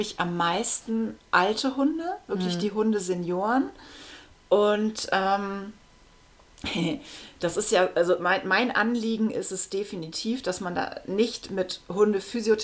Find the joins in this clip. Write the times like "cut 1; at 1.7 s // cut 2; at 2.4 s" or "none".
none